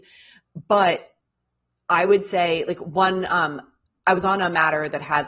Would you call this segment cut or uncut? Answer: uncut